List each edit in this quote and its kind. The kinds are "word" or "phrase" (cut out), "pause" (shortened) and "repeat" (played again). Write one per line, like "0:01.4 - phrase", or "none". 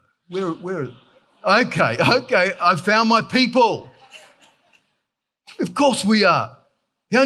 none